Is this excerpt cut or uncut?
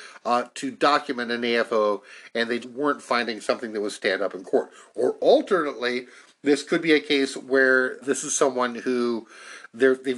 cut